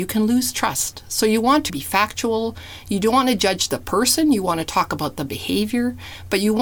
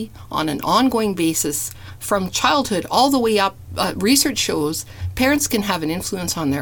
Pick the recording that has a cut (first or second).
first